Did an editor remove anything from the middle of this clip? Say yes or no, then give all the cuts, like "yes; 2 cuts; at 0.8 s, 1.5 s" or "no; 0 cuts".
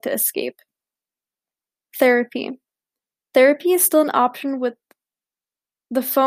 no; 0 cuts